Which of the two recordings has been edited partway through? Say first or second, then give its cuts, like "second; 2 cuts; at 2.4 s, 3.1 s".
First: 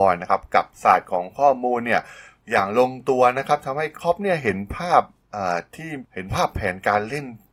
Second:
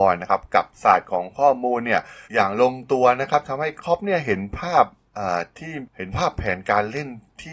second; 1 cut; at 2.2 s